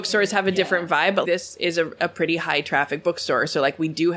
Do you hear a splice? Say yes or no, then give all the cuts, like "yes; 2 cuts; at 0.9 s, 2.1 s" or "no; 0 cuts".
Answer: yes; 1 cut; at 1.2 s